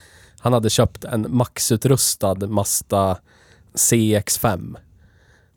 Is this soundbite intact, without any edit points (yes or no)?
yes